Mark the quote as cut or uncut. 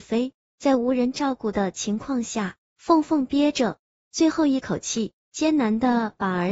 uncut